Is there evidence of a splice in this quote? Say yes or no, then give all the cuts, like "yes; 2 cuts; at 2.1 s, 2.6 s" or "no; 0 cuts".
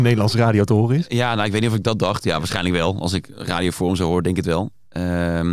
no; 0 cuts